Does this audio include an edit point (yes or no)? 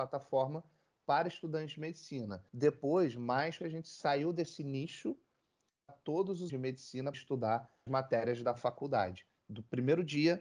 yes